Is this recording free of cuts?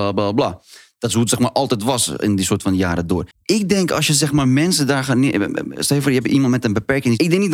no; 1 cut; at 3.3 s

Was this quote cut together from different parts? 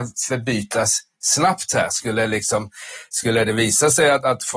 no; 0 cuts

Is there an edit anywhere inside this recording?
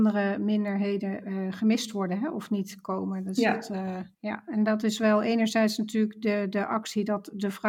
yes; 1 cut; at 4.1 s

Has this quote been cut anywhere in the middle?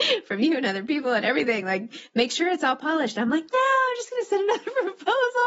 no; 0 cuts

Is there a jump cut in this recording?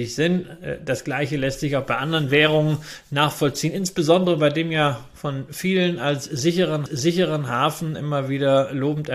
yes; 1 cut; at 6.9 s

